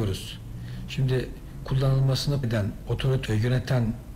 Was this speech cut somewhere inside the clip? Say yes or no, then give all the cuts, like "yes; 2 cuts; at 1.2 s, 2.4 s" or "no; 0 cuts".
yes; 3 cuts; at 1.6 s, 2.4 s, 3.3 s